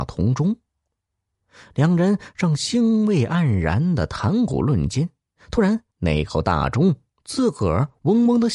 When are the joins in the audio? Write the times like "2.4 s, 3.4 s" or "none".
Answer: 5.9 s